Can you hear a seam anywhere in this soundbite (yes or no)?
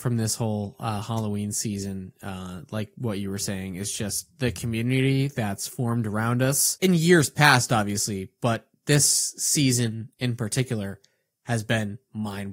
no